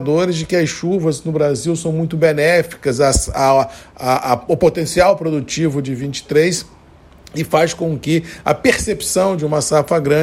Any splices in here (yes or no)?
no